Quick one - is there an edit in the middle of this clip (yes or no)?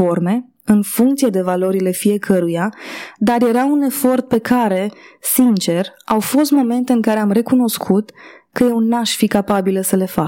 no